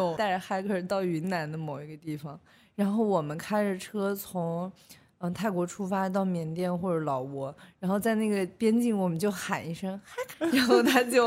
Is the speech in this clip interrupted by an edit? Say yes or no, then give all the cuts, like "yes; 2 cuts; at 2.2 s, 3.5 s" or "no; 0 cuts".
yes; 1 cut; at 10.3 s